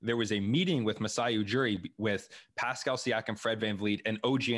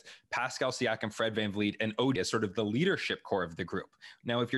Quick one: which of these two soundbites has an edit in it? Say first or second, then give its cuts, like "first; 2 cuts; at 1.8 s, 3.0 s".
second; 1 cut; at 2.2 s